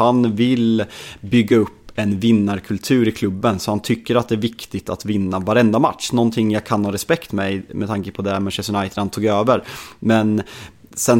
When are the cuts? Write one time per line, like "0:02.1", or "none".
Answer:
none